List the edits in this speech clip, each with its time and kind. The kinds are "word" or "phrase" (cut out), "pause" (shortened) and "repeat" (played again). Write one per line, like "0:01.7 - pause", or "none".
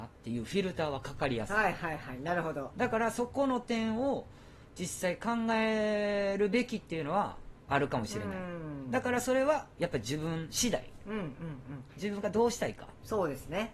0:02.7 - phrase